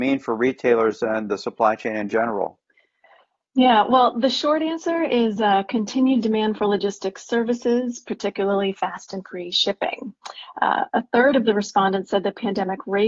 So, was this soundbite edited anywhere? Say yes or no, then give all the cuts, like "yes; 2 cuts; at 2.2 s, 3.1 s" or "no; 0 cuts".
no; 0 cuts